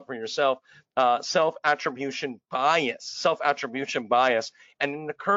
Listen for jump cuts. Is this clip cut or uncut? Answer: uncut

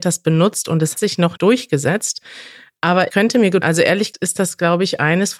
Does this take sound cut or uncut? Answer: cut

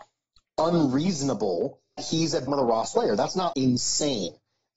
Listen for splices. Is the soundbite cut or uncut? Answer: cut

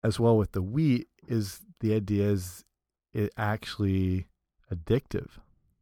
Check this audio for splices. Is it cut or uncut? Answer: uncut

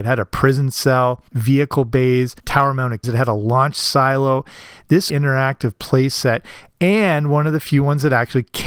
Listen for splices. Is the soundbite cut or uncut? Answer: cut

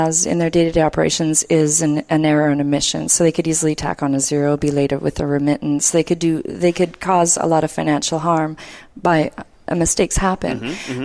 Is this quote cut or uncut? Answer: uncut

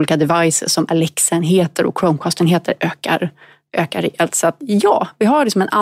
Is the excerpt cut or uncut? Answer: uncut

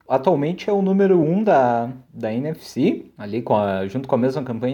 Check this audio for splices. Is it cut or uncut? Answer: uncut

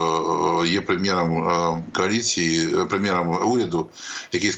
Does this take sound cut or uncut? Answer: uncut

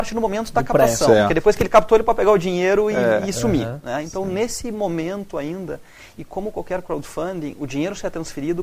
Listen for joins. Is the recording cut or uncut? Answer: uncut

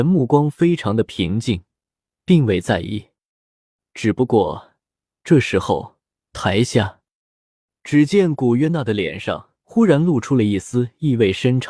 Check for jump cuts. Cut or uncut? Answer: uncut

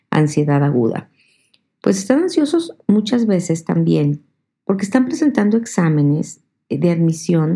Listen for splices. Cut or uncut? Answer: uncut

